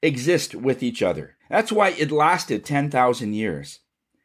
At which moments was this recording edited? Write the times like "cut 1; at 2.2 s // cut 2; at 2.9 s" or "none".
cut 1; at 1.4 s